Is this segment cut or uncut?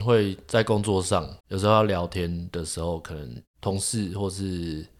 cut